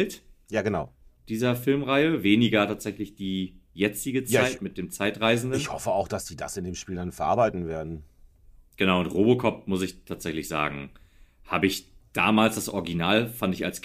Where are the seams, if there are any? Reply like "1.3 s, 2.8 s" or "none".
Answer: none